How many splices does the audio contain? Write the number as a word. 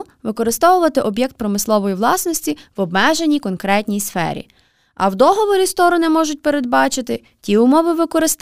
zero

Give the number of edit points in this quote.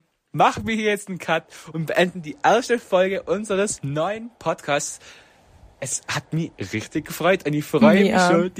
zero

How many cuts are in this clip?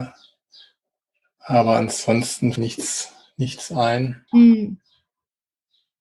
two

